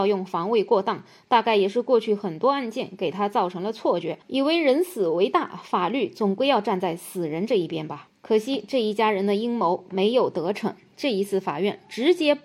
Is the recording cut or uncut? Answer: uncut